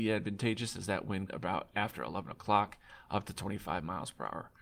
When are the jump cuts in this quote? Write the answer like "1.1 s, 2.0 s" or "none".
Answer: 1.3 s